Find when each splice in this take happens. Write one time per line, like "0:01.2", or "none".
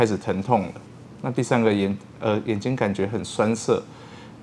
none